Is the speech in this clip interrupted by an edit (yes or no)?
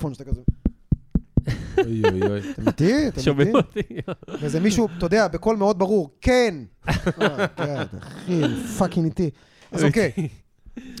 no